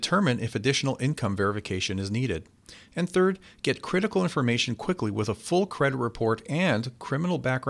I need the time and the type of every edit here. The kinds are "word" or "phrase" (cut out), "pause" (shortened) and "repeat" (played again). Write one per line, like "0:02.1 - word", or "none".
none